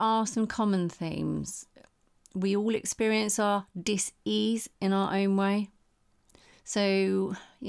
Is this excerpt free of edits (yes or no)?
yes